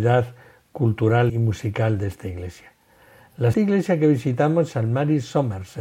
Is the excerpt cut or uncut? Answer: cut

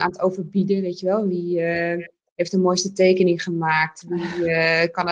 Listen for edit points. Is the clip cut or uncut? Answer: uncut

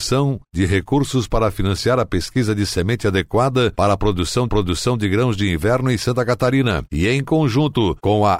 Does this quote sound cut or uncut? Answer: cut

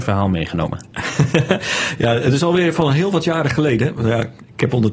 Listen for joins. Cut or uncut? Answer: uncut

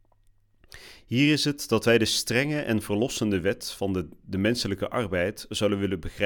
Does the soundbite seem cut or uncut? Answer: uncut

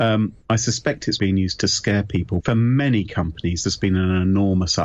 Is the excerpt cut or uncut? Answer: cut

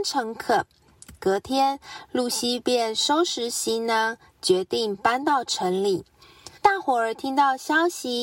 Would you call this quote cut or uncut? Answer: cut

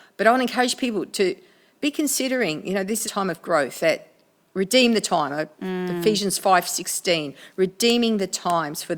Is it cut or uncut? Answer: cut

